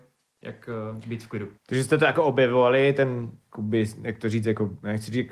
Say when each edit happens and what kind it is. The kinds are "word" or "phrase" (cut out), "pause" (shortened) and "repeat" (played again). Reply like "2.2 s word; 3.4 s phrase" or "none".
1.6 s pause